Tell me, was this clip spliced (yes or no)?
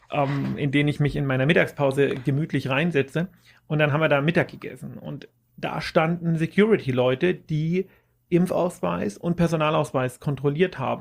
no